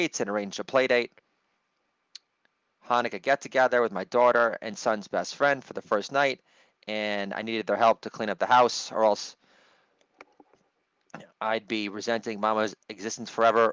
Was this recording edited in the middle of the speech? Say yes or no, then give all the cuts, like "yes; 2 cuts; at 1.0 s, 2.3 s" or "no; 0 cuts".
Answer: no; 0 cuts